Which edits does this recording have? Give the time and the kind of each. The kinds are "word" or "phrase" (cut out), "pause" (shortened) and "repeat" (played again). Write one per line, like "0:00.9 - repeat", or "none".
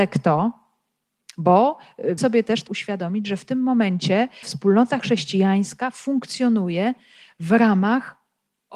0:02.2 - word
0:02.7 - word
0:04.4 - word